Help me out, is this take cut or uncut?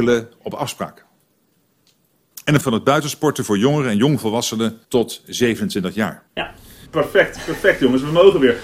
cut